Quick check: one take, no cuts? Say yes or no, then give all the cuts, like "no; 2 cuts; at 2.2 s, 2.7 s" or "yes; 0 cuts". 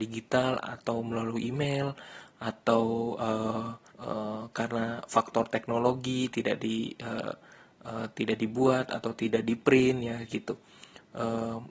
no; 1 cut; at 3.9 s